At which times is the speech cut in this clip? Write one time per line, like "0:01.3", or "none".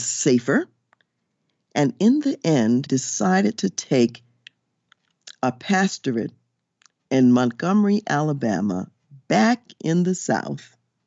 0:02.9